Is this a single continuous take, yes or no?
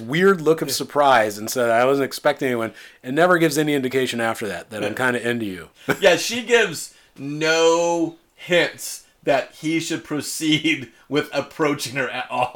yes